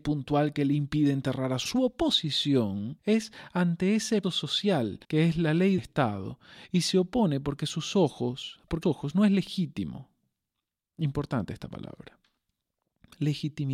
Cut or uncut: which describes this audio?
cut